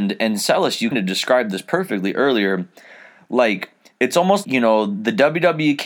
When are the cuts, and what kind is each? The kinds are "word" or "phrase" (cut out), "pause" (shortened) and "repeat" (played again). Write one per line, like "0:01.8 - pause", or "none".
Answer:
0:00.9 - word
0:04.4 - word